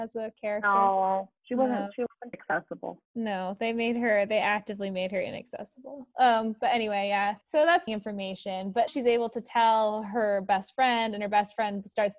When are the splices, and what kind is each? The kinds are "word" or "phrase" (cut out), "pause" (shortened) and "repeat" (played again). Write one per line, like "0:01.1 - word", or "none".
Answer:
0:01.4 - pause
0:02.3 - word
0:03.0 - pause
0:07.4 - pause
0:07.9 - word
0:08.9 - word